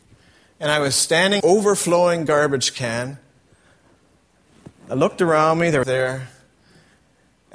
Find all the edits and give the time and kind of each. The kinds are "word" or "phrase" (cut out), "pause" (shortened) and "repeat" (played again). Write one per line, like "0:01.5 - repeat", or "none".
0:01.4 - phrase
0:05.8 - phrase